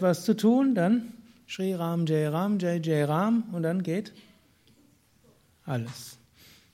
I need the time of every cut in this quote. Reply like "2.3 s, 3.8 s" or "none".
none